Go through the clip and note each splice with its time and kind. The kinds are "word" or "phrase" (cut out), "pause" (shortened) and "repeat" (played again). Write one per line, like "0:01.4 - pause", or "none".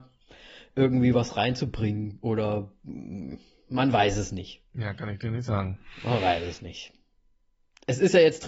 none